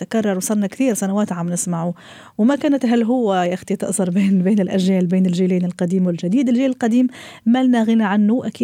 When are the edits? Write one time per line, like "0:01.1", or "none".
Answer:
none